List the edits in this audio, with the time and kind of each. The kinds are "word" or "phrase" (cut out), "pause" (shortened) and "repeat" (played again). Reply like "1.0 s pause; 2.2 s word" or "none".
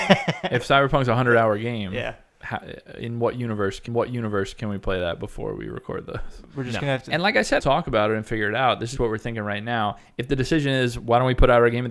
3.9 s repeat; 7.6 s phrase; 9.0 s word